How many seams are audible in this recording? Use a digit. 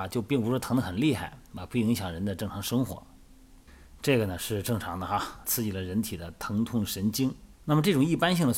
2